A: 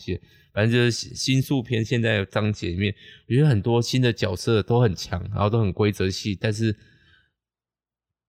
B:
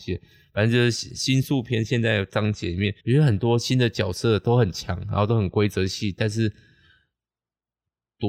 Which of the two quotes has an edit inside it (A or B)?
B